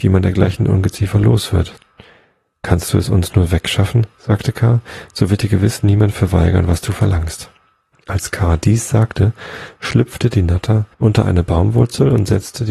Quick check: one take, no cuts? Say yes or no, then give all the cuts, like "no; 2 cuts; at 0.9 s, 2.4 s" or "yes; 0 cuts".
no; 2 cuts; at 7.9 s, 10.9 s